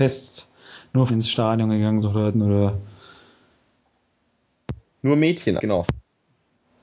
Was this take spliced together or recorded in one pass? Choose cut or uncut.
cut